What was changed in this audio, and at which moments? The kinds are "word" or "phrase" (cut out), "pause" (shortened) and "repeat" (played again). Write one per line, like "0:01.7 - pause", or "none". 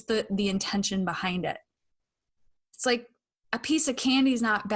none